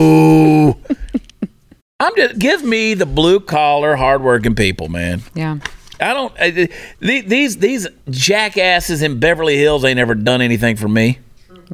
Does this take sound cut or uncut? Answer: cut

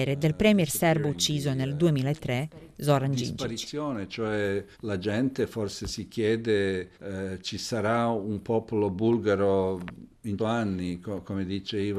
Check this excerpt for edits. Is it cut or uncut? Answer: cut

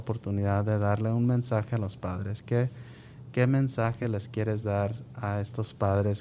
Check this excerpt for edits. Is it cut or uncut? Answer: uncut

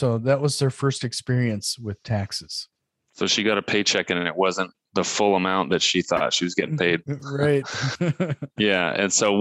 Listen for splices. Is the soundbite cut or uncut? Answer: uncut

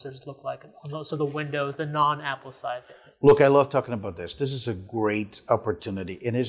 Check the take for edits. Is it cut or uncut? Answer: uncut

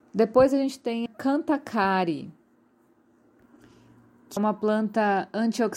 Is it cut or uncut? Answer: cut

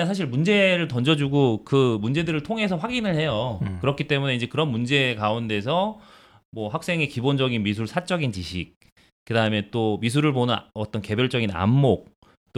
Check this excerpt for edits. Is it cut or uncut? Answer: uncut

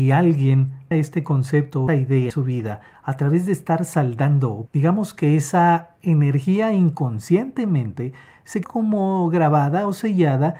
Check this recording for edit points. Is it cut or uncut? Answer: cut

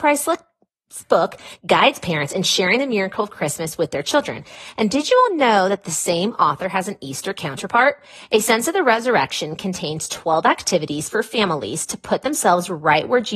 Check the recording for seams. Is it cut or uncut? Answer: uncut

